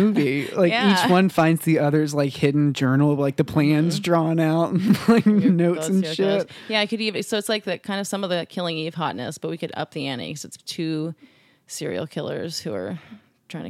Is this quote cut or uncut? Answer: uncut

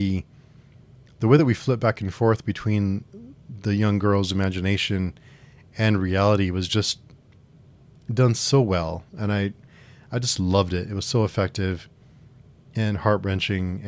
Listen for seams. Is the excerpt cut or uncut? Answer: uncut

